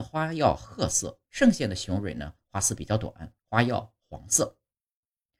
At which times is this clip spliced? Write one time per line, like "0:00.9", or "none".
0:01.3
0:03.4

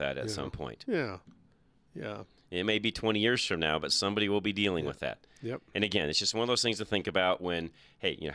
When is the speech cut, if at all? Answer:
none

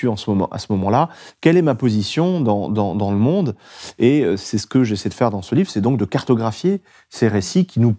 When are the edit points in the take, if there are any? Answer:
none

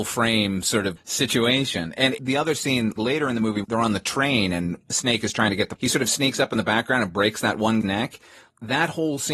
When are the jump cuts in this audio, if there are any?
0:01.0
0:03.0
0:03.6
0:05.8
0:07.8

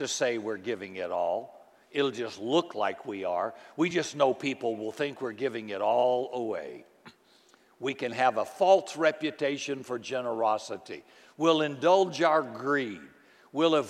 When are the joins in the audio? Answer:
none

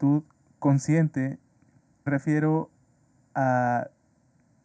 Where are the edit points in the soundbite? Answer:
0:02.1

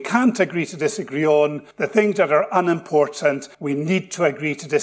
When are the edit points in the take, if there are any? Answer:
0:01.7
0:03.5

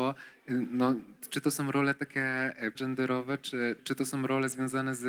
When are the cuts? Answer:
0:02.8
0:03.8

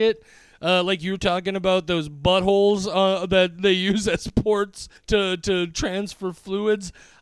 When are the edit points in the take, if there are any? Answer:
0:05.0

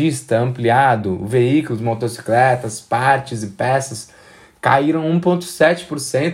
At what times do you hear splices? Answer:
none

